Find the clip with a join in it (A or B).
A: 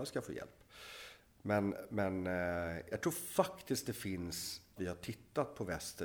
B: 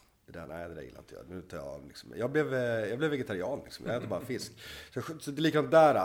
A